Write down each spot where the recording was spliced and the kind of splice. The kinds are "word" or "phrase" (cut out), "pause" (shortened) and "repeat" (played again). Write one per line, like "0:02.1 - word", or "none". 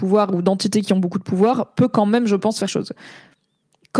0:02.7 - phrase